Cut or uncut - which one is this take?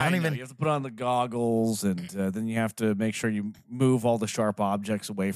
uncut